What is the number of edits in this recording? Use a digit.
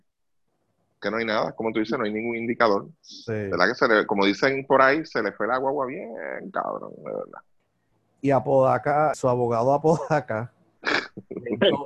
2